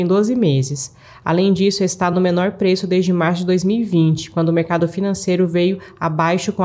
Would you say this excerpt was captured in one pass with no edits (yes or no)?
yes